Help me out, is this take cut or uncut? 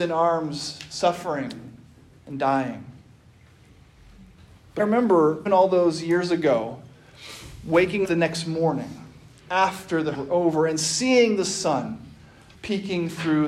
cut